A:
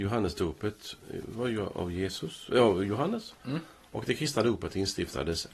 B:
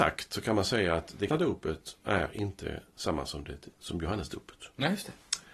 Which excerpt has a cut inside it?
B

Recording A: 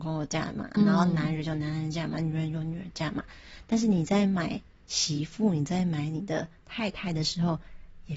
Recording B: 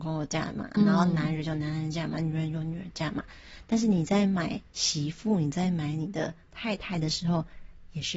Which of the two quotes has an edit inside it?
B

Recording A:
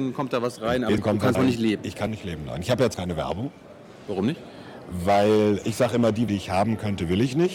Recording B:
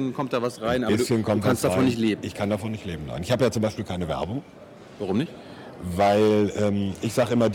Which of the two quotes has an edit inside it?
A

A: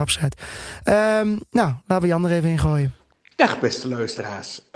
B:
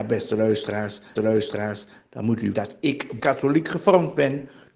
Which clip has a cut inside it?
B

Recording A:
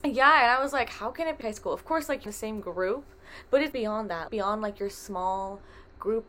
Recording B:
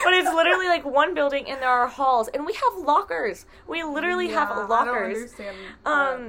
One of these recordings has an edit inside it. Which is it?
A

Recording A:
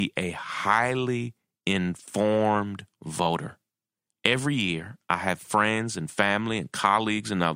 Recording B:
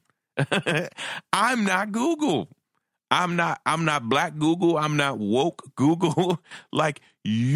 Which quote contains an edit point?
A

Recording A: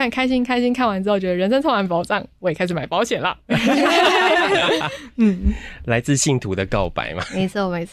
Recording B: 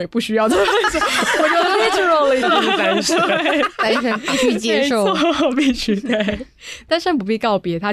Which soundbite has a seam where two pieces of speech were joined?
B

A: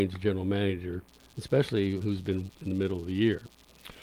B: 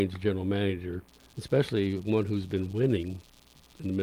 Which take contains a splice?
A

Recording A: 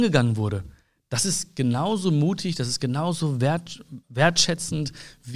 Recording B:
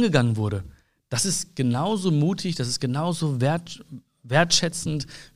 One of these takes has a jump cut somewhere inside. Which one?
A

